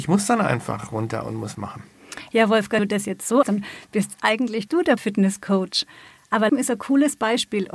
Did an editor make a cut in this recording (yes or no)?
yes